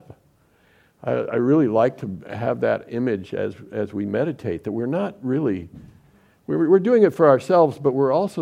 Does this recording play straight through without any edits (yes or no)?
yes